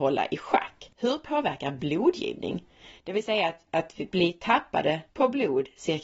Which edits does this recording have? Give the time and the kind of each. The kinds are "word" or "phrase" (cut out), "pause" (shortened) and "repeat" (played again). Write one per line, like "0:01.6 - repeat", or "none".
0:00.9 - pause
0:05.1 - pause